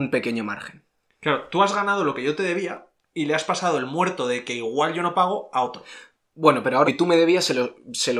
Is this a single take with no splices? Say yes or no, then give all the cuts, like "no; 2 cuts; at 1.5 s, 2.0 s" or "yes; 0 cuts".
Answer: no; 1 cut; at 6.9 s